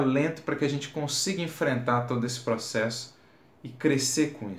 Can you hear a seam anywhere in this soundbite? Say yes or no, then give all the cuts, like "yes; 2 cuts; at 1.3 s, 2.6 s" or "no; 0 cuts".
no; 0 cuts